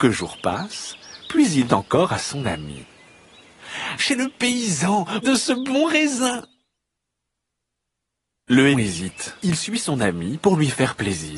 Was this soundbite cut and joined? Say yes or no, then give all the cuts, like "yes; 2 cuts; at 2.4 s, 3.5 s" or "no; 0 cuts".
yes; 5 cuts; at 1.7 s, 4.0 s, 5.2 s, 8.7 s, 9.4 s